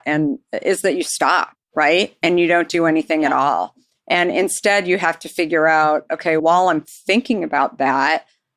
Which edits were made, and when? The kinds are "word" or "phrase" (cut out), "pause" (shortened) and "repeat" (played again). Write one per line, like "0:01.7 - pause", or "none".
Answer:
0:01.6 - pause
0:06.4 - word